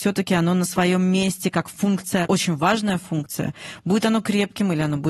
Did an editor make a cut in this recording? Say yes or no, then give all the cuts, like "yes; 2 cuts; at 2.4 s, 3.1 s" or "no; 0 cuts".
no; 0 cuts